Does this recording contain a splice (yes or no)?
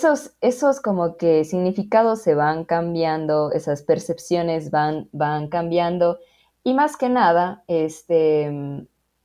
no